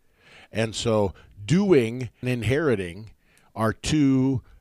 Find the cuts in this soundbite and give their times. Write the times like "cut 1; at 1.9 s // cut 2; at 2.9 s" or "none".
cut 1; at 2.2 s